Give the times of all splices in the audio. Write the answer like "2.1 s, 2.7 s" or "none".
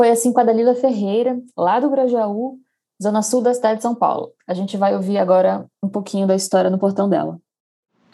none